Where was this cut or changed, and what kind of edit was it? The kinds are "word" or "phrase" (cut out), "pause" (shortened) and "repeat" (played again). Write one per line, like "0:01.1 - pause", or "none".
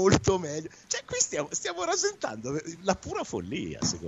none